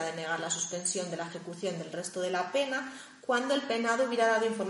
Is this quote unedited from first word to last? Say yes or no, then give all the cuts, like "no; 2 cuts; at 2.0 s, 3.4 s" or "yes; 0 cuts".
yes; 0 cuts